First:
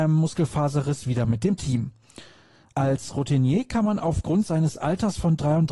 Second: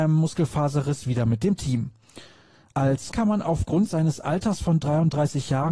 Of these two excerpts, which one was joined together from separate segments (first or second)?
second